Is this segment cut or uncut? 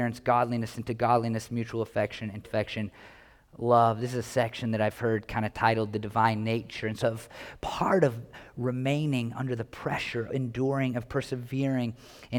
cut